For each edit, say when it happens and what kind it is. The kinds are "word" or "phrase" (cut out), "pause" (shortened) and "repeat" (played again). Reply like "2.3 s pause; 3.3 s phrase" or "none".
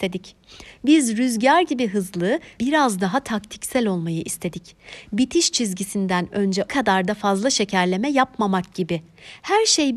2.6 s word; 6.7 s word

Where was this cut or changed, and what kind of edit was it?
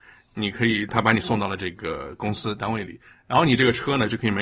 none

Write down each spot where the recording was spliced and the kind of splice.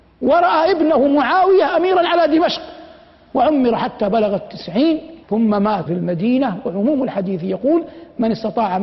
5.2 s pause; 5.9 s word

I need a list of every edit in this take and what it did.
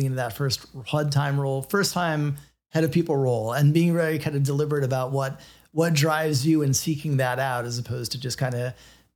none

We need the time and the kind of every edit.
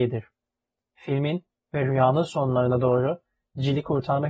none

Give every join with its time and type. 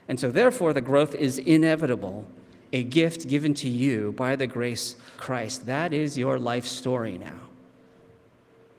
5.2 s word

